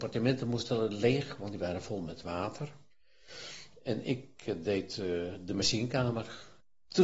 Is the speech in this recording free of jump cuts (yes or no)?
yes